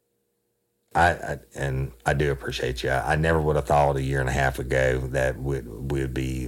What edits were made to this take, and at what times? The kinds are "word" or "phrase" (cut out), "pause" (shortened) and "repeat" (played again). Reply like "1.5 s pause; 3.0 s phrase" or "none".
none